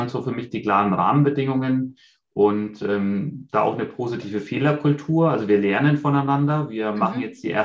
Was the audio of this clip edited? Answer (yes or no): no